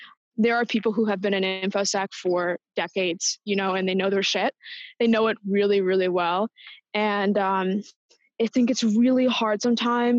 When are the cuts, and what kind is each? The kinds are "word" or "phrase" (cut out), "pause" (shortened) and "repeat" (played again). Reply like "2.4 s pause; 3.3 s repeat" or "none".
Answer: none